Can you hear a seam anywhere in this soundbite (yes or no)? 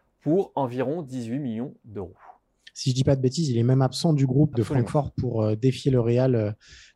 yes